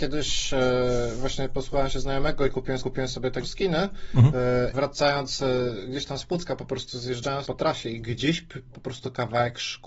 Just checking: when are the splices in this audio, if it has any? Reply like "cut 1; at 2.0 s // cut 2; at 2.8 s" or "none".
cut 1; at 2.8 s // cut 2; at 3.4 s // cut 3; at 4.7 s // cut 4; at 7.4 s // cut 5; at 8.7 s